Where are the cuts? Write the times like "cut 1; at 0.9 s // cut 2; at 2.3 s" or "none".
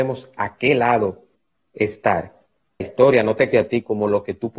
cut 1; at 2.8 s // cut 2; at 3.5 s